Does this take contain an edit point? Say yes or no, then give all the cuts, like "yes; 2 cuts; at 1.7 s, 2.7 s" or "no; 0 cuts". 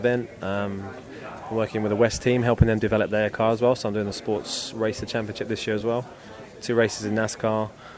no; 0 cuts